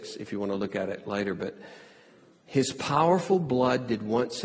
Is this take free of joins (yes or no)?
yes